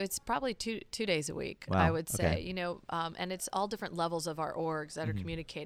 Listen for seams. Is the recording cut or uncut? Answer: uncut